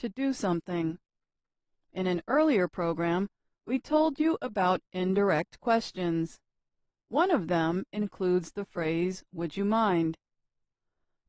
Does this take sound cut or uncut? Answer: uncut